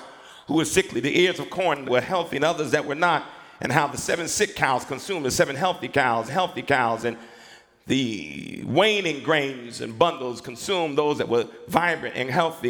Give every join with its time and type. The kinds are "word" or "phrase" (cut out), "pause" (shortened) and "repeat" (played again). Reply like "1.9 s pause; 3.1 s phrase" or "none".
1.8 s phrase; 6.3 s repeat